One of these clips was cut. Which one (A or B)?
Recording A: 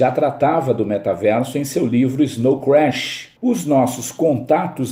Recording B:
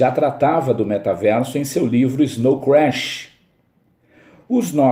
A